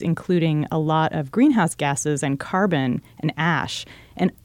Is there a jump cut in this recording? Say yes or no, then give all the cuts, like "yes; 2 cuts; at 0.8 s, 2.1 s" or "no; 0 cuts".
no; 0 cuts